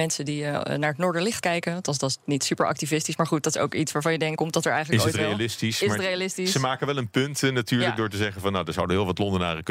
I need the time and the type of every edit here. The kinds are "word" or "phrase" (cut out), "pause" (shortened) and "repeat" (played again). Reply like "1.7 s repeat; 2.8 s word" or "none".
1.4 s word; 4.4 s word